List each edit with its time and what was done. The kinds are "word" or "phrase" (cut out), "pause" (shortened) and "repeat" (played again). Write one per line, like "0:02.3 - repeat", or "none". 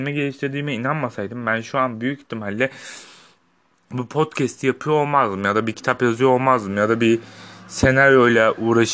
none